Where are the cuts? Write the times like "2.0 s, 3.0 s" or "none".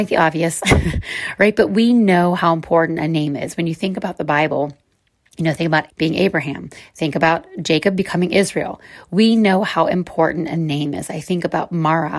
5.9 s